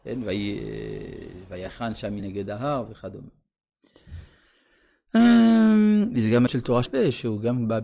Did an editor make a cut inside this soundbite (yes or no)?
yes